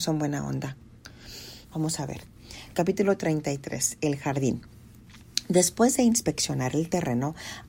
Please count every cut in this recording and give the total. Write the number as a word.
one